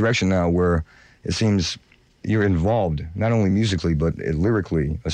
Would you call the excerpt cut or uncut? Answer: uncut